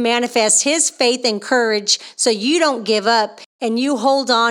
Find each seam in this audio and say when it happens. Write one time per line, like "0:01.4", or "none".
none